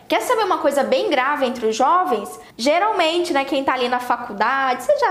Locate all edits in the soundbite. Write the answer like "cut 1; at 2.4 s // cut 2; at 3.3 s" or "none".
cut 1; at 2.5 s